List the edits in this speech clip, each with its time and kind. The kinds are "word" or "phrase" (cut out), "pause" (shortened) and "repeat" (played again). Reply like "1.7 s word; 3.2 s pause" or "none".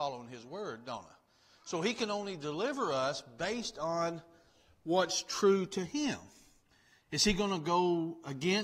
none